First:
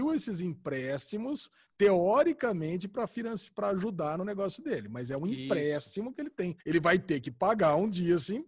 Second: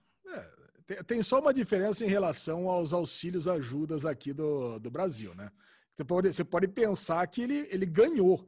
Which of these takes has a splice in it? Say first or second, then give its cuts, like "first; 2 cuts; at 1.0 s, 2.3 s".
first; 1 cut; at 6.6 s